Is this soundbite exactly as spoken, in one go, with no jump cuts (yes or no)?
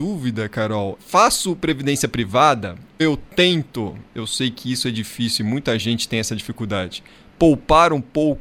no